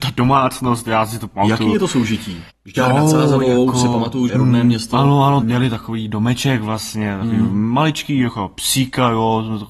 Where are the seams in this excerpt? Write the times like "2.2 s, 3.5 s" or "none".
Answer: 2.5 s, 4.3 s, 5.4 s